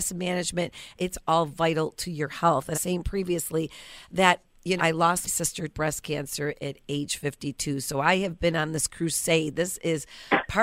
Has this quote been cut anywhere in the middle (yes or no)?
yes